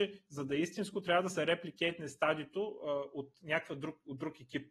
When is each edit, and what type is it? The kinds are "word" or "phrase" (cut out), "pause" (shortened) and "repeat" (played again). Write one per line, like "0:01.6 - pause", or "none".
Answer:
none